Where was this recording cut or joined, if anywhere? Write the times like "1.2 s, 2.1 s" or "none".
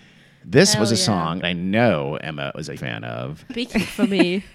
1.4 s, 2.8 s, 3.5 s